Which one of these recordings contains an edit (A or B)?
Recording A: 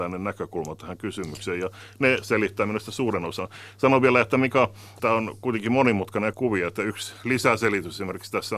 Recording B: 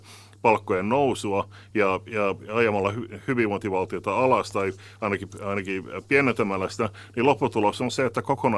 A